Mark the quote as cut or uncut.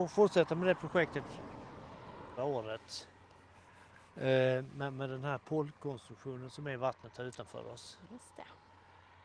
cut